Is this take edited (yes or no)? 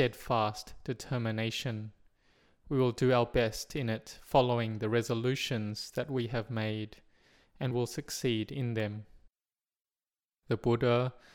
yes